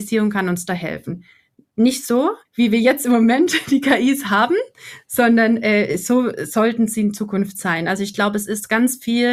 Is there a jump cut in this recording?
yes; 1 cut; at 2.5 s

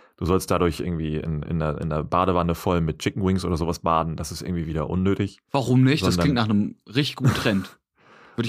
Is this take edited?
no; 0 cuts

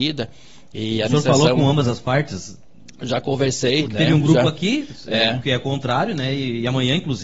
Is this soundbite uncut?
yes; 0 cuts

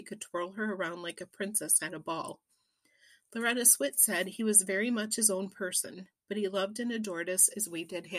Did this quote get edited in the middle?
no; 0 cuts

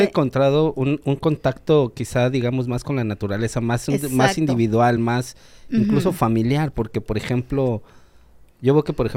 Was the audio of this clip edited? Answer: no; 0 cuts

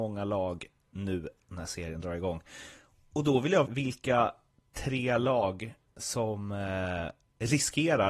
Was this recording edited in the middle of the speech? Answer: yes; 2 cuts; at 3.7 s, 5.8 s

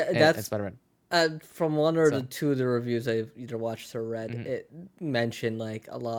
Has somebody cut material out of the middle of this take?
no; 0 cuts

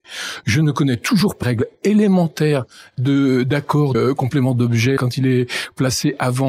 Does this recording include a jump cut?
yes; 3 cuts; at 1.4 s, 3.9 s, 5.0 s

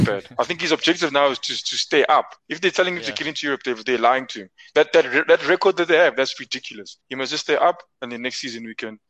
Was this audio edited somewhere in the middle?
yes; 2 cuts; at 2.4 s, 7.0 s

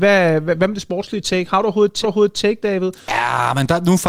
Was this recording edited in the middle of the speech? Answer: yes; 1 cut; at 2.0 s

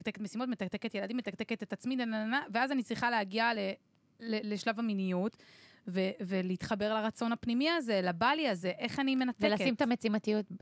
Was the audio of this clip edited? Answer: no; 0 cuts

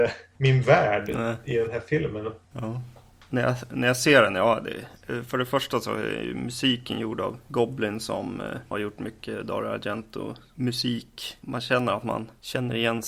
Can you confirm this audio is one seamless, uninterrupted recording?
yes; 0 cuts

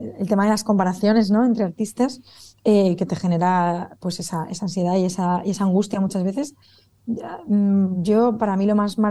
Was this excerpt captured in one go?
no; 1 cut; at 2.5 s

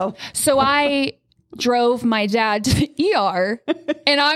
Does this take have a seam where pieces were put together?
no; 0 cuts

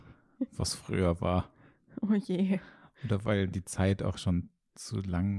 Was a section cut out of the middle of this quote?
no; 0 cuts

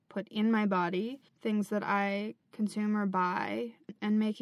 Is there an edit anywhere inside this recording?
yes; 2 cuts; at 1.3 s, 2.4 s

